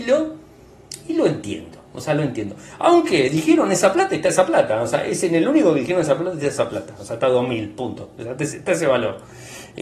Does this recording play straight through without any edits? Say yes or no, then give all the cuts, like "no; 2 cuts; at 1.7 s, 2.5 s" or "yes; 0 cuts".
yes; 0 cuts